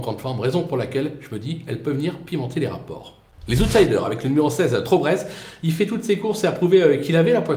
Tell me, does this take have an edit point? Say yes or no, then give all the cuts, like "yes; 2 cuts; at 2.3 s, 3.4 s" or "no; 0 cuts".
no; 0 cuts